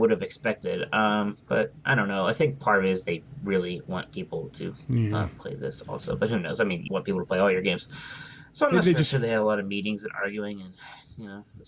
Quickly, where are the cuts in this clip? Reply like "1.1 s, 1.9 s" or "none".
6.9 s